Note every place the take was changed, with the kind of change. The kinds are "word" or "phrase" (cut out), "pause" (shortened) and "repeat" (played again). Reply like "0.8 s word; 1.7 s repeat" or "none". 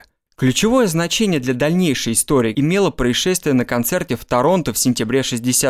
2.5 s word